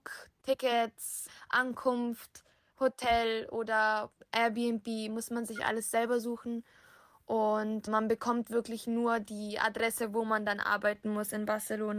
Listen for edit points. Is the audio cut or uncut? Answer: uncut